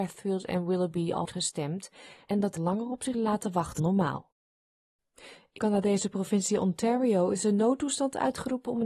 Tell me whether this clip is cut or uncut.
cut